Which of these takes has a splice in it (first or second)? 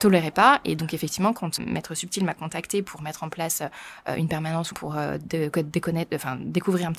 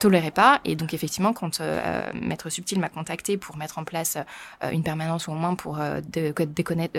first